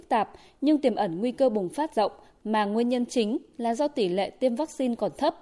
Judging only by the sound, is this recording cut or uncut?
cut